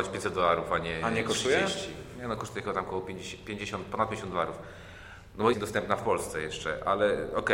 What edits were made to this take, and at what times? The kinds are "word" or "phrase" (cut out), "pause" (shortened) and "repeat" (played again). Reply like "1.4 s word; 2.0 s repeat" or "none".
5.5 s word